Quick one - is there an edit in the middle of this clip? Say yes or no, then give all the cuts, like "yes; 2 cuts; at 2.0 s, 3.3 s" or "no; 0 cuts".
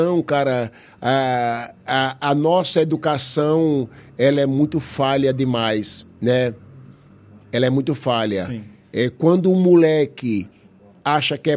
no; 0 cuts